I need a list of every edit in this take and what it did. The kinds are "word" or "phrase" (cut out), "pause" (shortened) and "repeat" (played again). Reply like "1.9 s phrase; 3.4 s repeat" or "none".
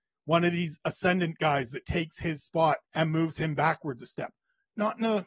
2.9 s pause